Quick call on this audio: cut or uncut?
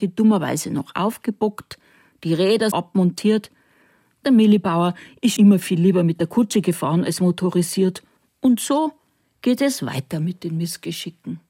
cut